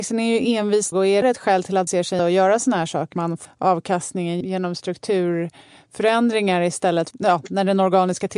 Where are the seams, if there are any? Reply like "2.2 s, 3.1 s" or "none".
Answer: 0.9 s, 1.2 s, 1.9 s, 2.2 s, 3.1 s, 3.4 s, 4.4 s, 7.1 s